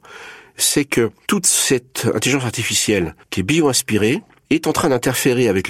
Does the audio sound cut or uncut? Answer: cut